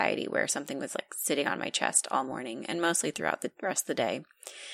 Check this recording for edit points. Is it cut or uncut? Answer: uncut